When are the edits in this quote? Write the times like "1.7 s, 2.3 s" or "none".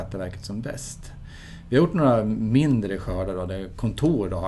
none